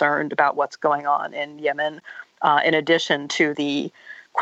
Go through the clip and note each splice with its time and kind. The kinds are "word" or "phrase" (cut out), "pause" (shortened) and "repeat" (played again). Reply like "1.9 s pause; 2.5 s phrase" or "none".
none